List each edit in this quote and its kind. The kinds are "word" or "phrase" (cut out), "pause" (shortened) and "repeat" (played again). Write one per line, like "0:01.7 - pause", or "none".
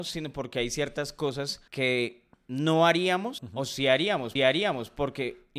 0:01.7 - pause
0:03.4 - word
0:04.4 - repeat